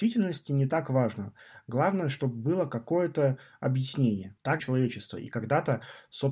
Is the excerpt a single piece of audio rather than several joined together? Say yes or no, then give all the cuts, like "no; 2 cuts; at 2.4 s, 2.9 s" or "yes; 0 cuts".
no; 1 cut; at 4.6 s